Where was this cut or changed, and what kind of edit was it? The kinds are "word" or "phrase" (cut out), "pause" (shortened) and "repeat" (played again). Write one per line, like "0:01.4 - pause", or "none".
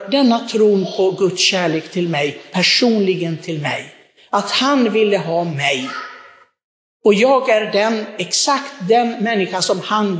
none